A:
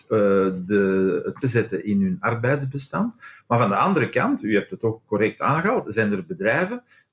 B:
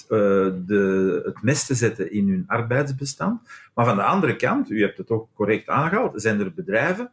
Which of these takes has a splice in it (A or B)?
A